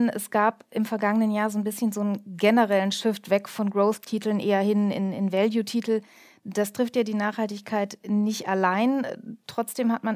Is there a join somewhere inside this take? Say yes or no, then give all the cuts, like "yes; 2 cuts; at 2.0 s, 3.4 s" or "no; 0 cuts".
no; 0 cuts